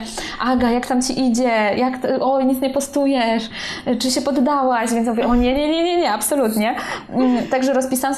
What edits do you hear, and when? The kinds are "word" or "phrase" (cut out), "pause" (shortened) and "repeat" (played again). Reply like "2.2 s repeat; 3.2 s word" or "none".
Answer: none